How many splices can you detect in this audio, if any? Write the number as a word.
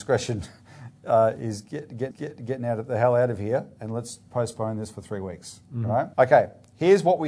two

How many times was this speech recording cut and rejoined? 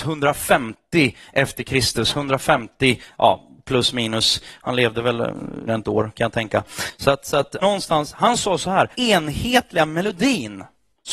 three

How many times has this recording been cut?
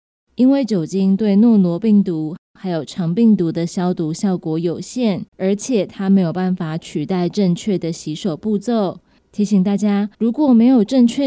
four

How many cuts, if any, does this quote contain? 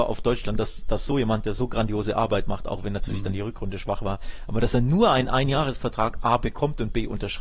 zero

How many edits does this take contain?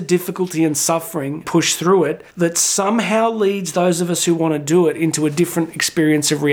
two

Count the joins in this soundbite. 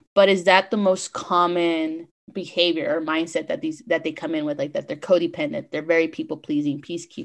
zero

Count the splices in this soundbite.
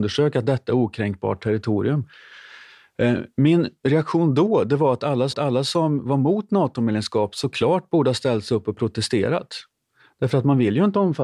one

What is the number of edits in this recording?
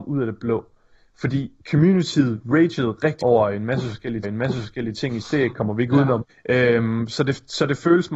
five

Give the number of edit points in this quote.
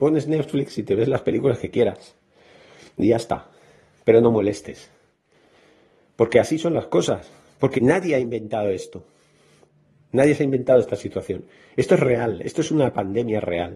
one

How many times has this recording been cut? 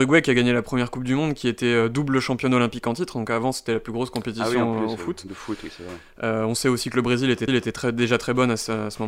one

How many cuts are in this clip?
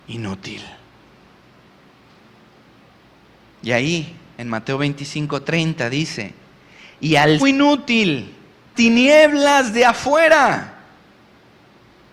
two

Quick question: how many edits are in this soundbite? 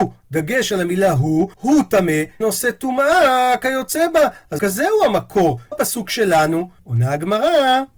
five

